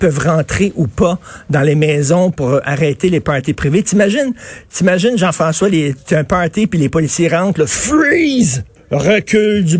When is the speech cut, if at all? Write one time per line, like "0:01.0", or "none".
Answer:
0:08.8